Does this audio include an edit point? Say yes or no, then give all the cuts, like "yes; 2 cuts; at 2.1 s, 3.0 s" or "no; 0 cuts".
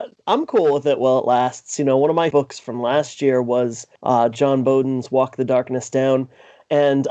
yes; 2 cuts; at 2.3 s, 4.0 s